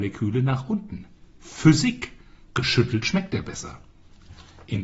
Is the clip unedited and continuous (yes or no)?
yes